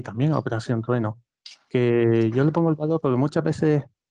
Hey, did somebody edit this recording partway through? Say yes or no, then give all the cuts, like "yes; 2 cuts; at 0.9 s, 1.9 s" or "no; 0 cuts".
no; 0 cuts